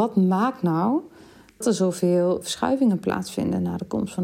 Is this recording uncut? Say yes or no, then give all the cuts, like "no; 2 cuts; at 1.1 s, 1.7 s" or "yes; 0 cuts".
no; 2 cuts; at 1.6 s, 2.4 s